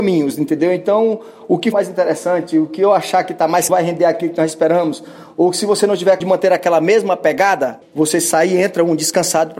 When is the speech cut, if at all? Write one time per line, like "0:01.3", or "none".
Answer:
0:01.7
0:03.7
0:06.2
0:07.8